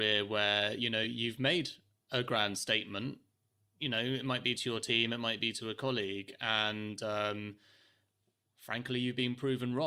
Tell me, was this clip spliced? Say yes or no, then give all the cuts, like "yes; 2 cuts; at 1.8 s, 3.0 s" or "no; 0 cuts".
no; 0 cuts